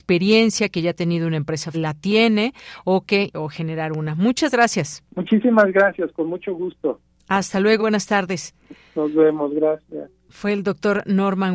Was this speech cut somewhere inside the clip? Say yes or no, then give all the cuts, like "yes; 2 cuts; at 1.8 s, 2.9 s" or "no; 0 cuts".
yes; 4 cuts; at 1.7 s, 3.3 s, 5.1 s, 7.8 s